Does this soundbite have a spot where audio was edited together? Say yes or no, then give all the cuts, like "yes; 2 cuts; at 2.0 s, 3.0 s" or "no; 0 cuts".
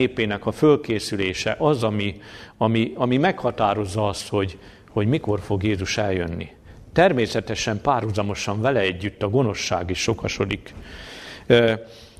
no; 0 cuts